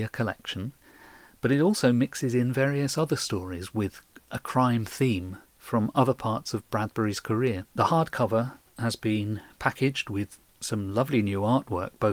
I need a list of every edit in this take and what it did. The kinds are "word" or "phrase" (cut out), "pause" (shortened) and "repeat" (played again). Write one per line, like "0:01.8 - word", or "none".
0:07.7 - pause